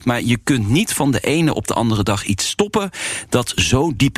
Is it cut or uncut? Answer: uncut